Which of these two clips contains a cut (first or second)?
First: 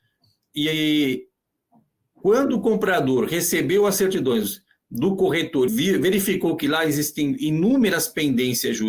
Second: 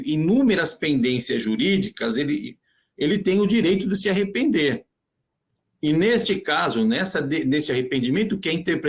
first